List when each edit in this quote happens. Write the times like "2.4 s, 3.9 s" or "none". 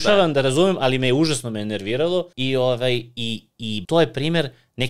2.3 s, 3.8 s